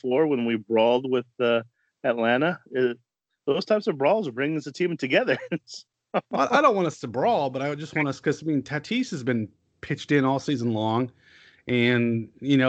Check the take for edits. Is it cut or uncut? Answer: uncut